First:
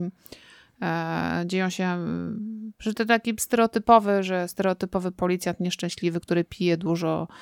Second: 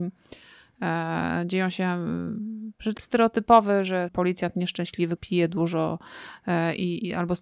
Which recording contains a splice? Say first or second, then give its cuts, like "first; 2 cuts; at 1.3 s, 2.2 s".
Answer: second; 3 cuts; at 3.0 s, 4.1 s, 5.2 s